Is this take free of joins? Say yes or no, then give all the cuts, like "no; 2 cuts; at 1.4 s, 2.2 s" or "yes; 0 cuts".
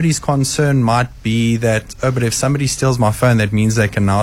yes; 0 cuts